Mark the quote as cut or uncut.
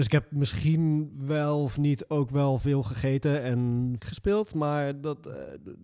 cut